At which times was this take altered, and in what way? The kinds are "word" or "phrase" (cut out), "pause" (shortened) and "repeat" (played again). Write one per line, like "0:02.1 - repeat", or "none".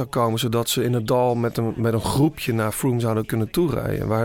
none